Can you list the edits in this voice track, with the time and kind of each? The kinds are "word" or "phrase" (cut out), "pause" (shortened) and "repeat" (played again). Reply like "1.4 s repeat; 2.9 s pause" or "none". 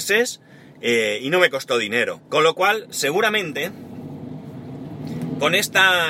2.3 s pause